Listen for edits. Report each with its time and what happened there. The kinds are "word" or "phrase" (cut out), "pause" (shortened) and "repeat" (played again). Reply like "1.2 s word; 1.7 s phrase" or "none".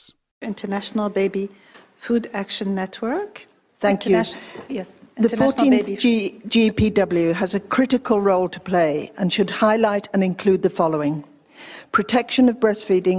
none